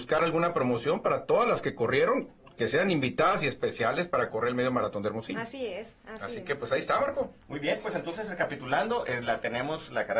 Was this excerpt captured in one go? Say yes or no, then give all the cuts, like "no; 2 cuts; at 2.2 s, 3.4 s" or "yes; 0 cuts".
yes; 0 cuts